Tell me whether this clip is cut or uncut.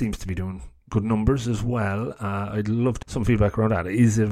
cut